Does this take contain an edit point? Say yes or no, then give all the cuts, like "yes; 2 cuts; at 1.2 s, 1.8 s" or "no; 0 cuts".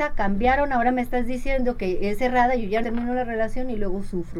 yes; 1 cut; at 2.8 s